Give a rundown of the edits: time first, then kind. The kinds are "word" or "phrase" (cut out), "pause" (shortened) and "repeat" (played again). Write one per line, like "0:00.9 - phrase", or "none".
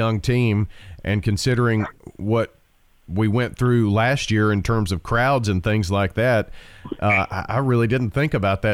none